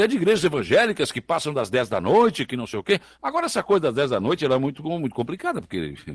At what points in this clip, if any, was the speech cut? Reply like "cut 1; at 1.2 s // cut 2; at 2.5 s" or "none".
none